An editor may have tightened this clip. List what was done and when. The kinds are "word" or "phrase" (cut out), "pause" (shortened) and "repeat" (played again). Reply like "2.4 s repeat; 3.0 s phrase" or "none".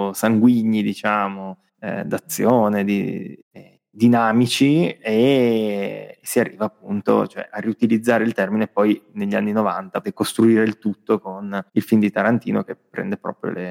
1.7 s pause; 3.4 s pause; 10.0 s word; 11.7 s pause